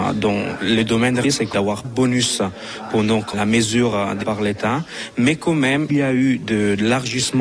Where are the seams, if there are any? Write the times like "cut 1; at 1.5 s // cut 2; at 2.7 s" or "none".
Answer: cut 1; at 1.2 s // cut 2; at 1.5 s // cut 3; at 1.8 s // cut 4; at 3.3 s // cut 5; at 4.2 s // cut 6; at 5.9 s